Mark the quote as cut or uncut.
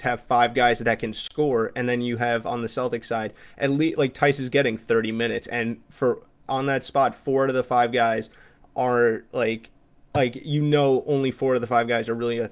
uncut